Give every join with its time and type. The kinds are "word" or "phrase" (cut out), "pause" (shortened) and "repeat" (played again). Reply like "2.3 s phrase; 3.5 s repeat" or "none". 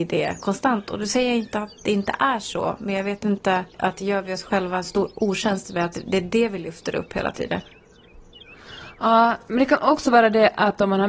3.7 s pause